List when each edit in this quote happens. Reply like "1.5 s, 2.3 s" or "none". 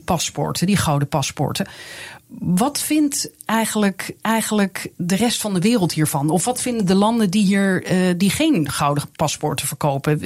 4.2 s